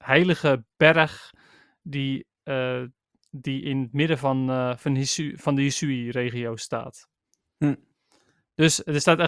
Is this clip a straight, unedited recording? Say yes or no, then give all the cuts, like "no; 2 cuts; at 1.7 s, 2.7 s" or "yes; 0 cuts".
yes; 0 cuts